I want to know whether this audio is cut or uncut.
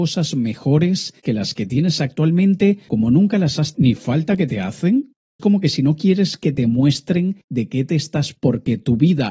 cut